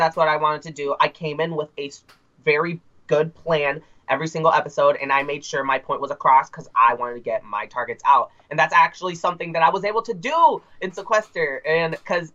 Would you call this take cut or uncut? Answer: uncut